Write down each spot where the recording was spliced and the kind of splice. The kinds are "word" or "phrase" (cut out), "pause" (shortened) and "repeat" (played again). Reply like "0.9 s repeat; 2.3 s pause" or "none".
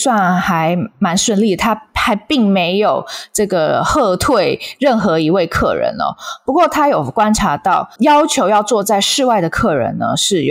8.0 s word